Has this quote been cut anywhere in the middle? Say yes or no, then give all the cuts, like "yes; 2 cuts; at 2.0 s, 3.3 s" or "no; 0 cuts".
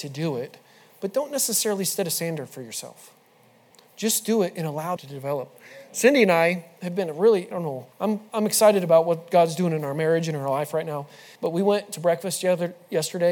yes; 5 cuts; at 3.7 s, 5.0 s, 7.5 s, 7.9 s, 11.3 s